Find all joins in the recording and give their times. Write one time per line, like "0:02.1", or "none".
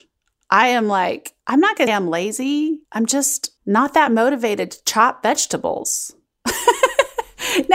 0:01.4
0:01.9
0:02.8
0:03.6